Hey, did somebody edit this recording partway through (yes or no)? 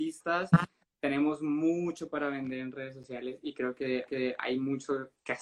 yes